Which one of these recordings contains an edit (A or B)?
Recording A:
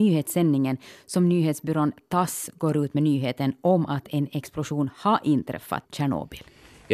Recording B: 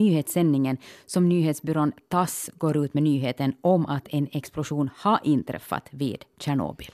A